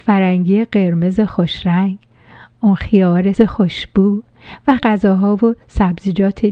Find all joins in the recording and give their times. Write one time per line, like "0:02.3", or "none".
0:03.3
0:04.8